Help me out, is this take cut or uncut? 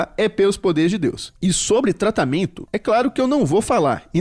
cut